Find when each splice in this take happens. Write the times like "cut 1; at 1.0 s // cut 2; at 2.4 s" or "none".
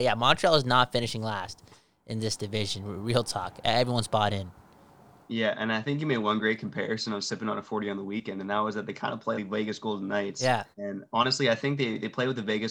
cut 1; at 9.3 s // cut 2; at 10.7 s